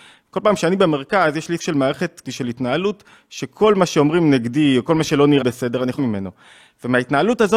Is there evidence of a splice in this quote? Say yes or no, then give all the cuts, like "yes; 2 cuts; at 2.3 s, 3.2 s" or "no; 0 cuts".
yes; 4 cuts; at 1.6 s, 2.2 s, 5.4 s, 6.0 s